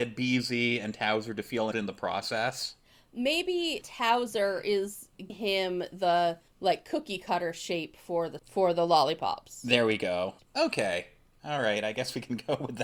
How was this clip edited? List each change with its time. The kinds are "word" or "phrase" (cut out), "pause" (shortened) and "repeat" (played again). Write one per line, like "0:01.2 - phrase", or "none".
0:01.7 - word
0:03.8 - word
0:05.3 - word
0:06.5 - pause
0:08.4 - word